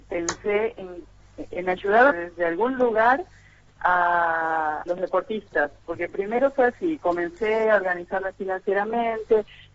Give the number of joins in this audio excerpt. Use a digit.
2